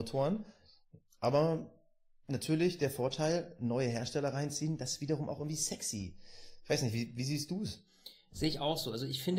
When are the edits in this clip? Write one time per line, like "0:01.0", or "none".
none